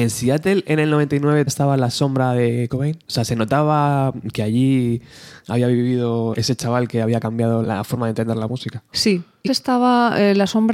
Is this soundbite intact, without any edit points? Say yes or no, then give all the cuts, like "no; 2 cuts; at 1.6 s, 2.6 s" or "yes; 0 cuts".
no; 6 cuts; at 1.5 s, 2.7 s, 3.0 s, 6.3 s, 7.6 s, 9.5 s